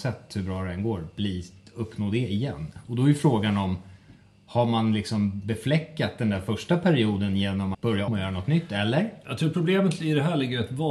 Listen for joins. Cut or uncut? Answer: cut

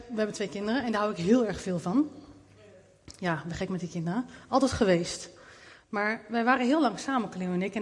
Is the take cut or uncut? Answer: uncut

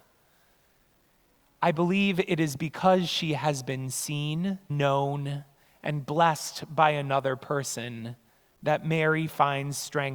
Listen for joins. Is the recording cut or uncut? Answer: cut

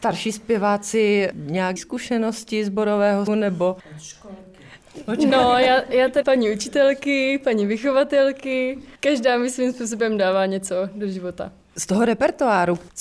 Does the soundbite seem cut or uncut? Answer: cut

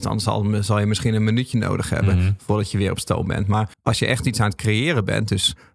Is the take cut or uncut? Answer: cut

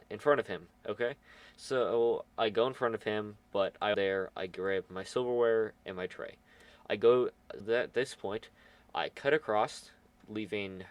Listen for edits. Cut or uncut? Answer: cut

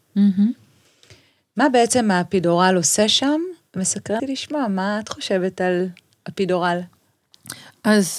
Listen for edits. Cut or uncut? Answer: cut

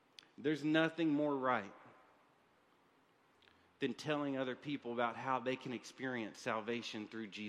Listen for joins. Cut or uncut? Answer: uncut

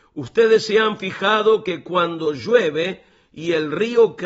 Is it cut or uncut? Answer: uncut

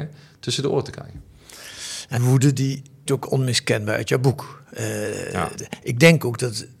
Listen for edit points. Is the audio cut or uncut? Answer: cut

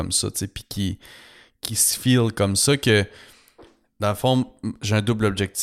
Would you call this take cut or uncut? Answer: uncut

